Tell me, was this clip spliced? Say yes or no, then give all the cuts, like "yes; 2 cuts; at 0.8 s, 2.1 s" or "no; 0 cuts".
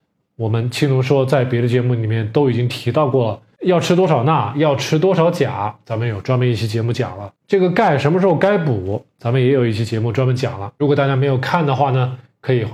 yes; 2 cuts; at 3.5 s, 7.4 s